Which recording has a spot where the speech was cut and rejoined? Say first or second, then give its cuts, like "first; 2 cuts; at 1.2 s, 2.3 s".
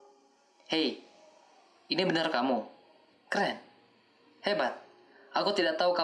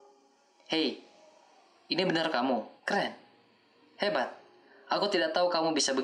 second; 1 cut; at 2.8 s